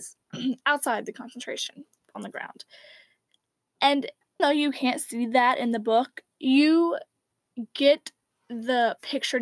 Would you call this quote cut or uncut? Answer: cut